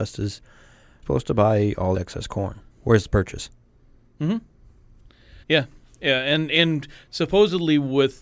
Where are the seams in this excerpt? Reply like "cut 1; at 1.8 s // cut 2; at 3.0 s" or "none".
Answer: cut 1; at 1.0 s // cut 2; at 1.9 s // cut 3; at 2.7 s // cut 4; at 5.4 s